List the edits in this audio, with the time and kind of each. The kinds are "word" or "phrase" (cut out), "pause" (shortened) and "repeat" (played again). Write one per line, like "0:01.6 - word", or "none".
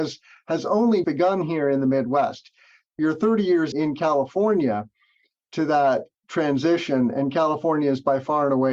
0:01.0 - word
0:03.7 - word